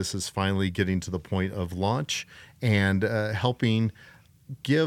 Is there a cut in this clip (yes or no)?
no